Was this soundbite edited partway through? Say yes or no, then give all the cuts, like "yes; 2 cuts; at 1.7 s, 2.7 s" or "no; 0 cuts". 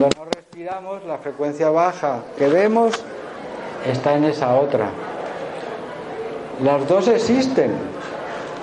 yes; 1 cut; at 2.4 s